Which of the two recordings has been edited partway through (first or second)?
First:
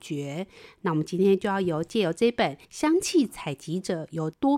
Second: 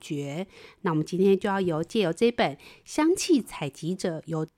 first